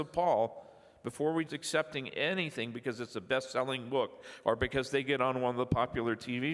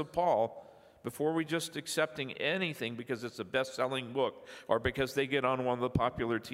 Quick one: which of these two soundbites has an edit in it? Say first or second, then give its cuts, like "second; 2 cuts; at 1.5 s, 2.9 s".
first; 1 cut; at 1.5 s